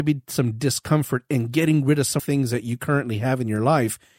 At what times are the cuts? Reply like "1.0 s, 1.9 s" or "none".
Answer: 2.2 s